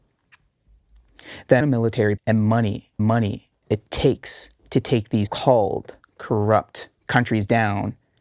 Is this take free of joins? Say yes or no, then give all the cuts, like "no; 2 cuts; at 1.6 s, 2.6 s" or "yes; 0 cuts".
no; 6 cuts; at 1.6 s, 2.2 s, 3.0 s, 4.6 s, 5.3 s, 7.0 s